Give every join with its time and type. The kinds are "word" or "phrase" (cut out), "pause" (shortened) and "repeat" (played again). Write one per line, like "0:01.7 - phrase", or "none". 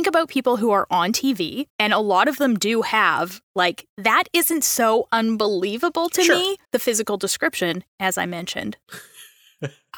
0:01.7 - pause
0:06.6 - pause

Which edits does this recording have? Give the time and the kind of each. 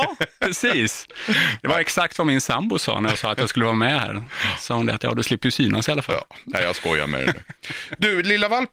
none

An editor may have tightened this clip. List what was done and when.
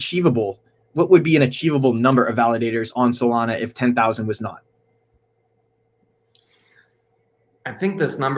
none

